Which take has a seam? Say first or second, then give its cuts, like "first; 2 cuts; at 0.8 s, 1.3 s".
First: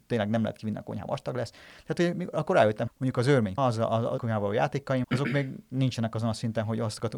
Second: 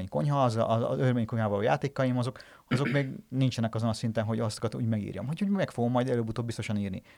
first; 6 cuts; at 1.1 s, 2.3 s, 2.9 s, 3.6 s, 4.2 s, 5.0 s